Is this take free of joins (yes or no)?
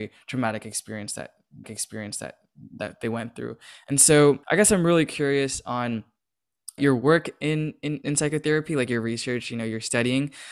no